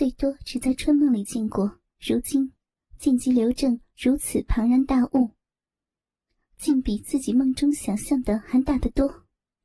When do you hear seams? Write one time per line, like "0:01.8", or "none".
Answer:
0:01.9